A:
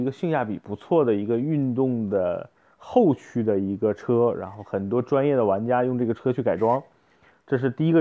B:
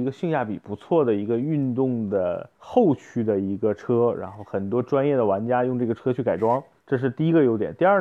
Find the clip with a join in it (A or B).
B